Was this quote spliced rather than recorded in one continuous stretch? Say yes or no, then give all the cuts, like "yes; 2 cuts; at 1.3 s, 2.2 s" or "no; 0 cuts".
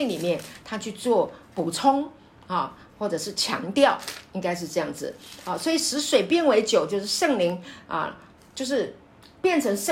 no; 0 cuts